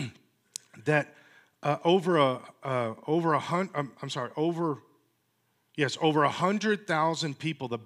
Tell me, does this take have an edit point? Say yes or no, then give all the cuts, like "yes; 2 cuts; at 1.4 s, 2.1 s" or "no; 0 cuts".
no; 0 cuts